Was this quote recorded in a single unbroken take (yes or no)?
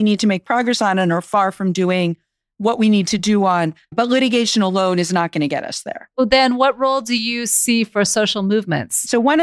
yes